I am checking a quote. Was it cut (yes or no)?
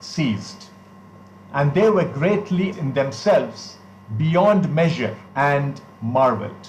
yes